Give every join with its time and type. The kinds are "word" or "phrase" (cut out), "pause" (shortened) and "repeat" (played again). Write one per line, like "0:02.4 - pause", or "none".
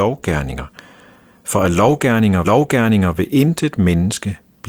0:02.4 - repeat

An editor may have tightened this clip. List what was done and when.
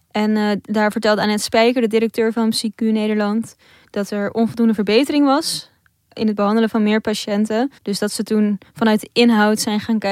0:07.8 - pause

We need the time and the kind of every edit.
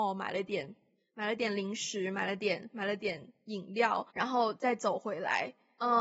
0:04.1 - pause

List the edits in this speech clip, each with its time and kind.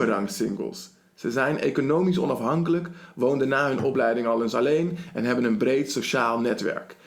none

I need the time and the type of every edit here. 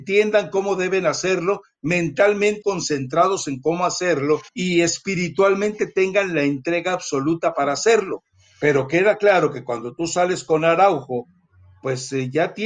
0:02.6 - word
0:04.5 - pause

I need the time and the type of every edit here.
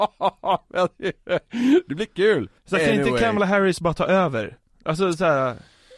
0:02.6 - pause

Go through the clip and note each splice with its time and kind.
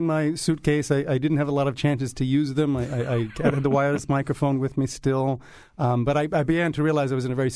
none

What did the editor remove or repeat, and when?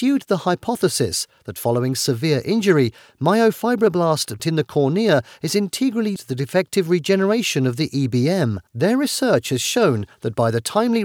0:04.4 - word
0:06.2 - word
0:08.7 - pause

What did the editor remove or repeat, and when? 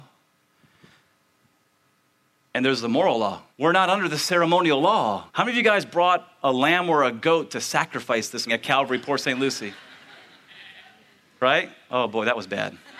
0:03.5 - pause
0:05.3 - pause
0:08.5 - word

